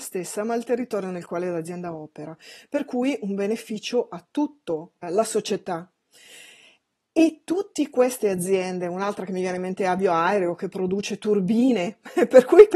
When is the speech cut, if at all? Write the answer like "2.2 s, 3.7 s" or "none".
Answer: 5.0 s